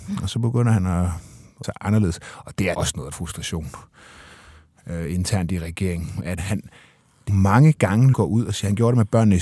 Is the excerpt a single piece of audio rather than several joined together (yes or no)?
no